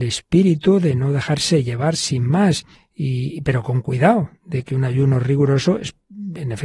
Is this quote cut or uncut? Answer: cut